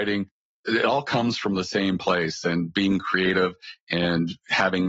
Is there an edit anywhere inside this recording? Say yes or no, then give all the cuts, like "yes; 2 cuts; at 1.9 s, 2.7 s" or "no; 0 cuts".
no; 0 cuts